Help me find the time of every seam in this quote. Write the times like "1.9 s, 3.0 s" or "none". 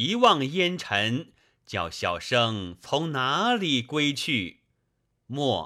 none